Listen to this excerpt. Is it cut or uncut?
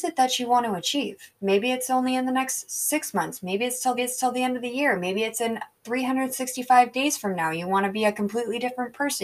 cut